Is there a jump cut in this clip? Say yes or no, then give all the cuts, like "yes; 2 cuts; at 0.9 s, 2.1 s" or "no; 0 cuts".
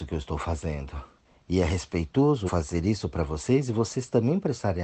yes; 2 cuts; at 1.2 s, 2.5 s